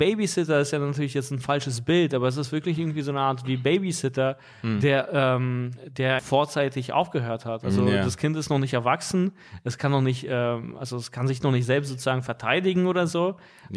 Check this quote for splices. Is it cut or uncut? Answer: cut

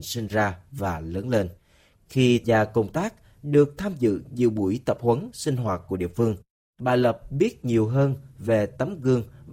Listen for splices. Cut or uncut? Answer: cut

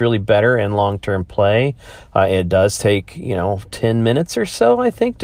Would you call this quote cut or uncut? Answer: uncut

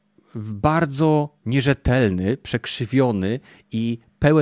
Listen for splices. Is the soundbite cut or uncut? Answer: cut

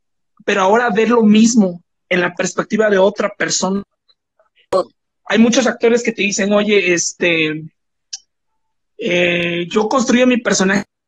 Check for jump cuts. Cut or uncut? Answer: uncut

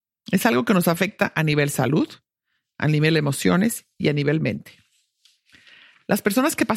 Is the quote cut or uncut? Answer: uncut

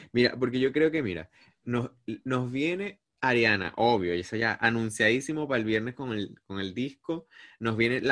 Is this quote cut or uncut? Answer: uncut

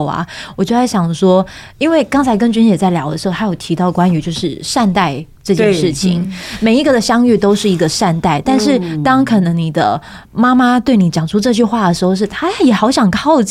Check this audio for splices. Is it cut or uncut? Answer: cut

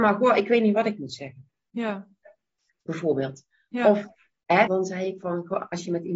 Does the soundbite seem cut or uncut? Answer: cut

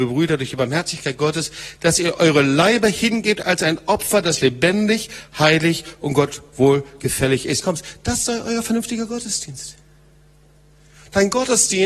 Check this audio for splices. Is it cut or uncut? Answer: cut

